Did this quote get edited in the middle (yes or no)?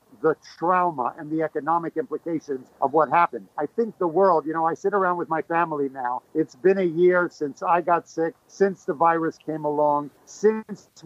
yes